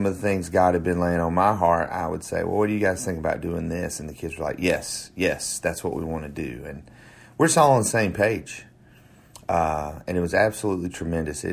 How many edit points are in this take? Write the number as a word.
zero